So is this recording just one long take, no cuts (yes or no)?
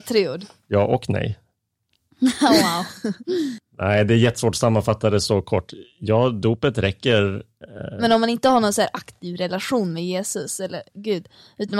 yes